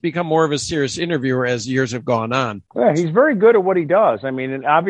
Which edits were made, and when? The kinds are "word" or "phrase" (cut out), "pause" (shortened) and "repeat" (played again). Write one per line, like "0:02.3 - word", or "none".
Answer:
0:02.7 - pause